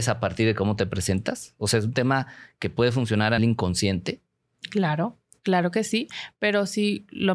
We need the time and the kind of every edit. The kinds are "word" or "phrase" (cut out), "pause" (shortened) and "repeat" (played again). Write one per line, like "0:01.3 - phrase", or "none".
0:03.4 - word